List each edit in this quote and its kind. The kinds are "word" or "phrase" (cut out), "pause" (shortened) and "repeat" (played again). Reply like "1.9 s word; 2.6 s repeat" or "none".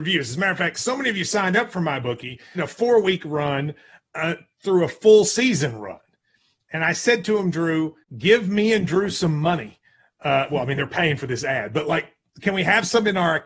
2.5 s phrase; 8.0 s pause